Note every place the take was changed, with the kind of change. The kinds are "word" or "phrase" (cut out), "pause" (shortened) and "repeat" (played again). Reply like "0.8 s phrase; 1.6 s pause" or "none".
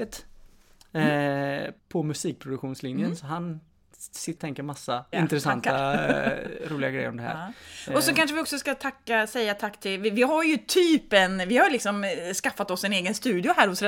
1.8 s pause; 4.4 s word; 5.1 s word